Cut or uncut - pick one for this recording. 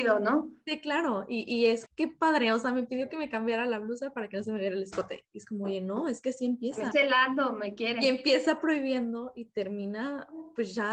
cut